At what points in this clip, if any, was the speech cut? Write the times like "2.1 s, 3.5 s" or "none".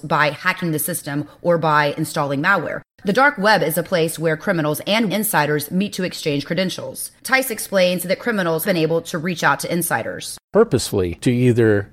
5.1 s, 8.6 s

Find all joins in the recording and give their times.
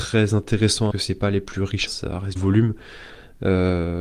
0.9 s, 1.9 s, 2.4 s

